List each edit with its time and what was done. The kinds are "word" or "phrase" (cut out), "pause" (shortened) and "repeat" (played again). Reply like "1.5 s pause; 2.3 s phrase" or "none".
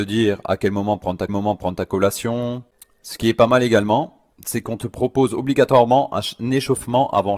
1.3 s repeat; 4.3 s pause